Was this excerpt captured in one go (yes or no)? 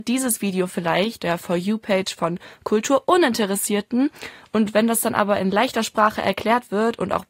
no